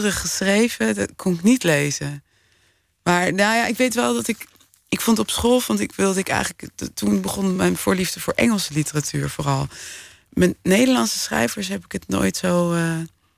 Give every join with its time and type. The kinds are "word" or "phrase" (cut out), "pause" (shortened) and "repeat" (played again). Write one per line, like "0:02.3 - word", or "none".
none